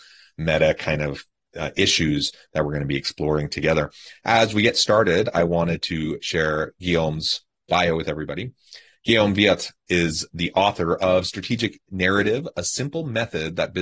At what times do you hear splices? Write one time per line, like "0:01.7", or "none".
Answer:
none